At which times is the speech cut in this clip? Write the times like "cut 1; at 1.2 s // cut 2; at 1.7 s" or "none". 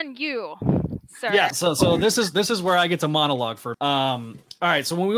cut 1; at 1.5 s // cut 2; at 3.7 s